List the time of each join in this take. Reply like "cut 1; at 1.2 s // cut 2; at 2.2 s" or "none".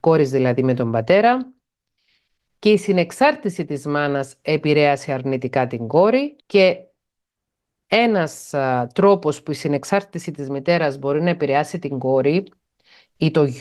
cut 1; at 6.4 s